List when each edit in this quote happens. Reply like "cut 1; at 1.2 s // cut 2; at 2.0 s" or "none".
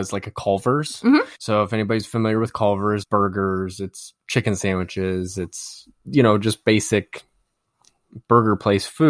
cut 1; at 1.3 s // cut 2; at 3.0 s